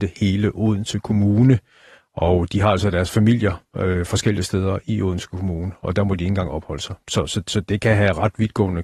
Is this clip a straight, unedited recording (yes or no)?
yes